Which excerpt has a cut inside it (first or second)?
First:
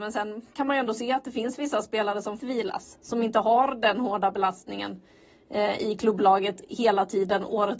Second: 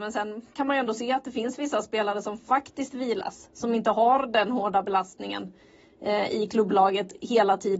first